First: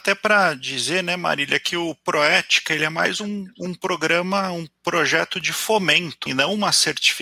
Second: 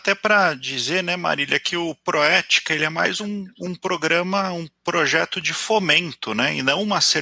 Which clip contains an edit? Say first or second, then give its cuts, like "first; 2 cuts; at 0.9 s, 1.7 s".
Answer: first; 1 cut; at 6.3 s